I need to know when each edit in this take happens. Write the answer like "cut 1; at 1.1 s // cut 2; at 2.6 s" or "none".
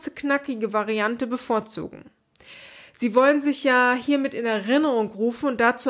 none